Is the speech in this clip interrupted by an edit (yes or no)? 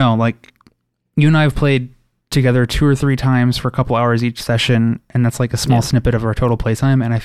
no